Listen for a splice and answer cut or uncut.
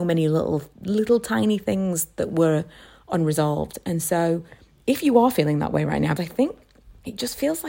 cut